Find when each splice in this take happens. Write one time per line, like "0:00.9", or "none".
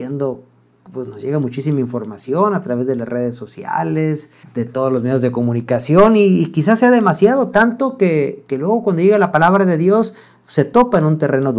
0:04.4